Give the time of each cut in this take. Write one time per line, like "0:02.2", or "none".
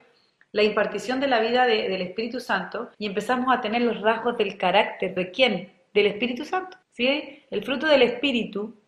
0:02.9
0:05.2
0:06.8